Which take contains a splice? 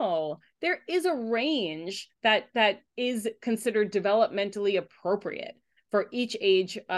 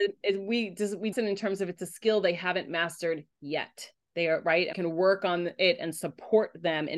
second; 2 cuts; at 1.1 s, 4.7 s

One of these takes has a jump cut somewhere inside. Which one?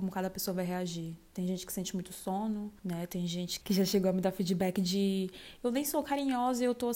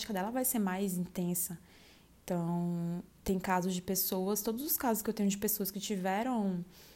first; 2 cuts; at 2.8 s, 3.6 s

